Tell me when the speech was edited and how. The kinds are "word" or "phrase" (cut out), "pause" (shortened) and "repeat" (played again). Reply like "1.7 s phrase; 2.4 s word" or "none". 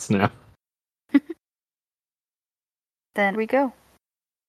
3.3 s word